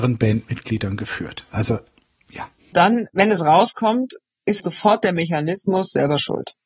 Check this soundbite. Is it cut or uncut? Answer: cut